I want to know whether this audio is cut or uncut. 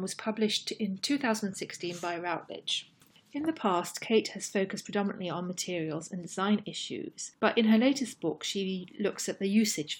uncut